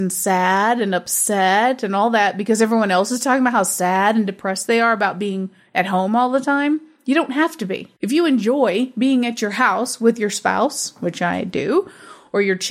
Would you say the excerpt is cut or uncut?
cut